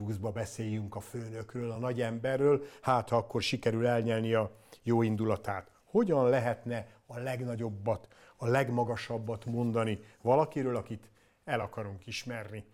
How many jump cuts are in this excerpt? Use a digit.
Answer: 0